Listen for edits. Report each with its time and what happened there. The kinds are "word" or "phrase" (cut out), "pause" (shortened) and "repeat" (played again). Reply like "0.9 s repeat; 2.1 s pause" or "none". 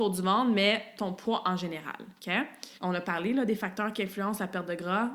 2.8 s pause